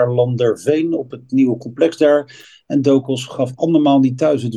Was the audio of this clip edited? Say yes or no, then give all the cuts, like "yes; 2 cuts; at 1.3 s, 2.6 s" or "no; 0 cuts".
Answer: no; 0 cuts